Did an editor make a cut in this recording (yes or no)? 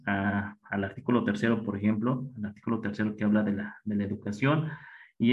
no